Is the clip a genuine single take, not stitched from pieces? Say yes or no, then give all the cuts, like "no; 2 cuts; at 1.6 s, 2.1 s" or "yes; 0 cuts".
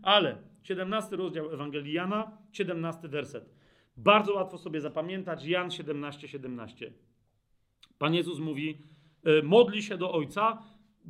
yes; 0 cuts